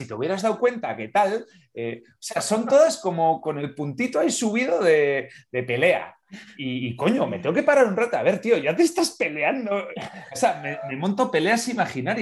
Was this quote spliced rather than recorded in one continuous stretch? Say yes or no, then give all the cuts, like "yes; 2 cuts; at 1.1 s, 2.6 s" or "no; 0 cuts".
no; 0 cuts